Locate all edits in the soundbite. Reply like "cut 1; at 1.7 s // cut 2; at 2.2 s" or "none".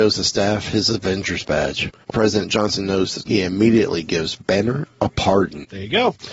cut 1; at 2.1 s // cut 2; at 3.2 s // cut 3; at 4.4 s

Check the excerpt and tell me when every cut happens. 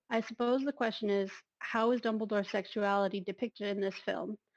none

